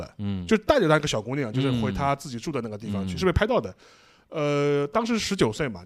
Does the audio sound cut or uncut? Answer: uncut